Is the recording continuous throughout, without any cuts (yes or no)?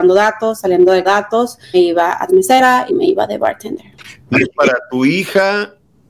no